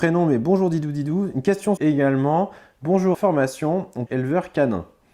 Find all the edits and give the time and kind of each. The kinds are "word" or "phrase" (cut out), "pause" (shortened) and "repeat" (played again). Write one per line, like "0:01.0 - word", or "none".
0:01.8 - phrase
0:03.1 - phrase
0:04.1 - phrase